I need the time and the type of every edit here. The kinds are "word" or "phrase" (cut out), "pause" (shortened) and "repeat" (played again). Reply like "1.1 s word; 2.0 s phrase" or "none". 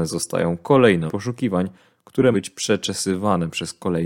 1.1 s word; 2.3 s word